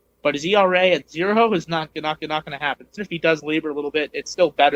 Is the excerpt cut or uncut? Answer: cut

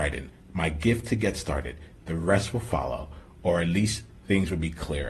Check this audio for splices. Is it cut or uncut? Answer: uncut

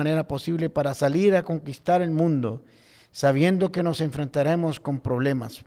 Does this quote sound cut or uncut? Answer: uncut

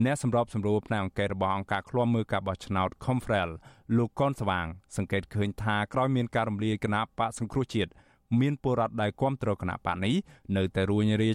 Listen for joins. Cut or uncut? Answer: uncut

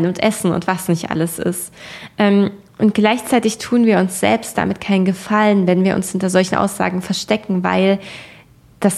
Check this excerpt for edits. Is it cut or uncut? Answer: uncut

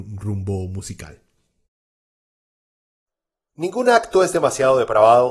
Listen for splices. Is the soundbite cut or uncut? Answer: uncut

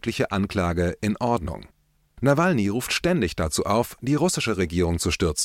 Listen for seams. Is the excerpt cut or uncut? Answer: uncut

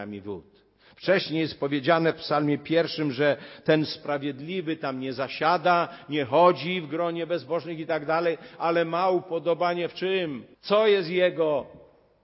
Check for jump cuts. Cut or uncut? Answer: cut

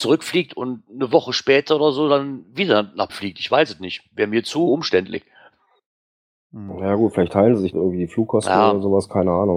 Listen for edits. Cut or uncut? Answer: cut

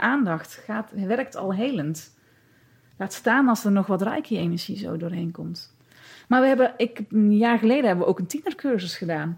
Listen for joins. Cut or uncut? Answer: uncut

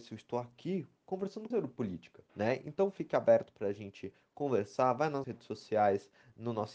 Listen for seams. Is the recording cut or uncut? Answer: cut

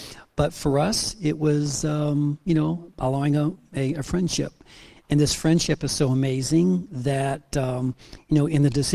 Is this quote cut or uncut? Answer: uncut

